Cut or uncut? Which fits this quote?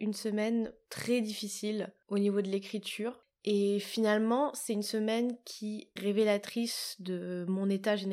cut